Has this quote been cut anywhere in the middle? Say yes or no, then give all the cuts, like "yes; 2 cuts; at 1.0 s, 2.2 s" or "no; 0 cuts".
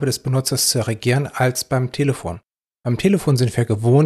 no; 0 cuts